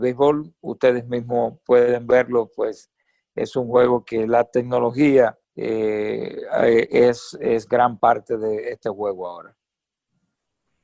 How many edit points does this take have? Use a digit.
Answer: 1